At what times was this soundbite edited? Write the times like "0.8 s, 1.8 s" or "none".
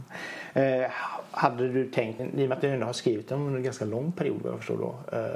2.2 s